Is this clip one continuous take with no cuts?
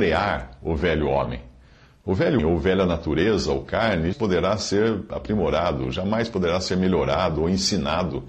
no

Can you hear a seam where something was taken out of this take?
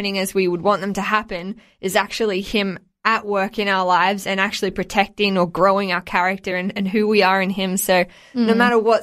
no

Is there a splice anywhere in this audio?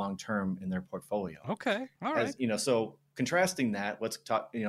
no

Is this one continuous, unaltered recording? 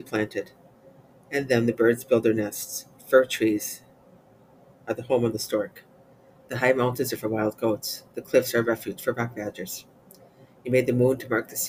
yes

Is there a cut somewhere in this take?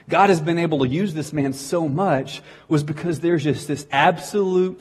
no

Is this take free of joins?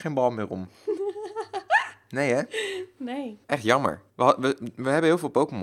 no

